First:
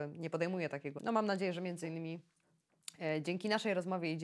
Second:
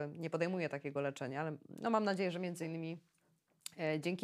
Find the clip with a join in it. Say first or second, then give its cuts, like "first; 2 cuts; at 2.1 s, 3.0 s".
first; 1 cut; at 1.0 s